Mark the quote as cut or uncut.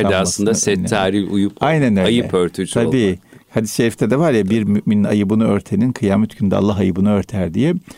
uncut